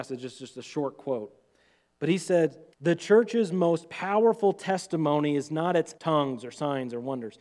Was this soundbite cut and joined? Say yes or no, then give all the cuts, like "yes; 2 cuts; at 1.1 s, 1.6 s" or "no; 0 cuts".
yes; 2 cuts; at 2.7 s, 6.0 s